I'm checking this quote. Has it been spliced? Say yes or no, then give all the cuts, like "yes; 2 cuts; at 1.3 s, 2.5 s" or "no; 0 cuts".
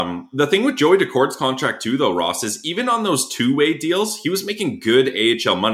no; 0 cuts